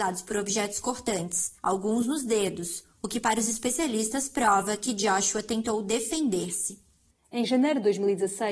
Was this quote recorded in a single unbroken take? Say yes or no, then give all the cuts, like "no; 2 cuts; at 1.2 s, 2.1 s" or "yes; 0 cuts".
no; 1 cut; at 1.6 s